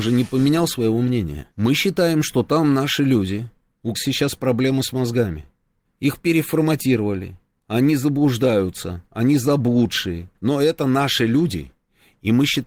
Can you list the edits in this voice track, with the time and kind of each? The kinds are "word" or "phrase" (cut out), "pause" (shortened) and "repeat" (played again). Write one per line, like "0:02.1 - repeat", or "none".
0:01.5 - pause
0:03.9 - word